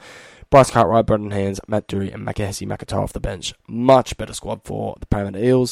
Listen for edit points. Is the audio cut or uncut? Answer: uncut